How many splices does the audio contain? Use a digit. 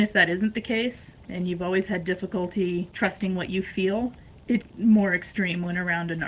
1